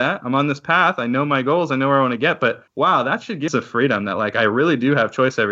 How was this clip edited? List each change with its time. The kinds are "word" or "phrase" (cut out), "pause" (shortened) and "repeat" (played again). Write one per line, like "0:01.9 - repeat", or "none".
0:02.7 - pause
0:03.5 - phrase